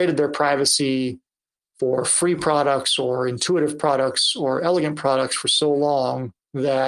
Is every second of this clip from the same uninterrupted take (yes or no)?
yes